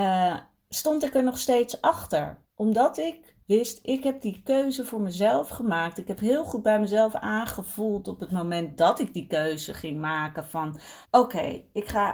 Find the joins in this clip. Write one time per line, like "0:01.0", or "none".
0:02.5
0:03.4
0:11.0